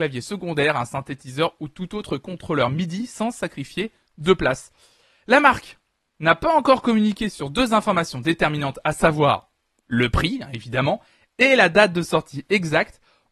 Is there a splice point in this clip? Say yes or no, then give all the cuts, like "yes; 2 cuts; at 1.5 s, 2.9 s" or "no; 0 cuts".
no; 0 cuts